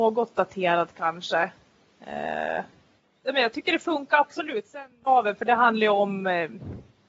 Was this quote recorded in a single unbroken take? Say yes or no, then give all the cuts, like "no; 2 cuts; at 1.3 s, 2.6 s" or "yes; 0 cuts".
yes; 0 cuts